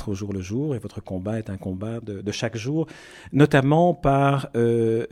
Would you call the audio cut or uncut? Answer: uncut